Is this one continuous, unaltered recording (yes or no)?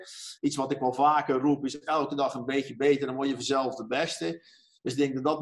yes